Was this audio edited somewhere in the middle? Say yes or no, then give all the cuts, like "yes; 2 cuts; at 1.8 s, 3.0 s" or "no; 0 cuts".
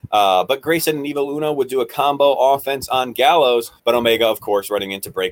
yes; 1 cut; at 3.8 s